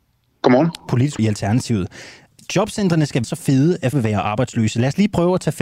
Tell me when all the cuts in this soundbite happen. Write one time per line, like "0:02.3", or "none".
0:01.2
0:03.2
0:03.9